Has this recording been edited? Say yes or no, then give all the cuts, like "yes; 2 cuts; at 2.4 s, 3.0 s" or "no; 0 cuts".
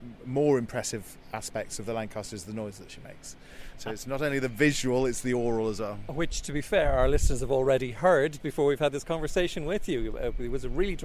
yes; 1 cut; at 8.4 s